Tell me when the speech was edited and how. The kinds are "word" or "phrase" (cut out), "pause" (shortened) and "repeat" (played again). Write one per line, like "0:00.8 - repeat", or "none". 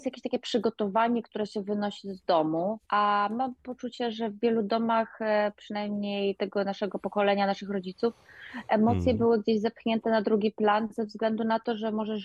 0:02.8 - pause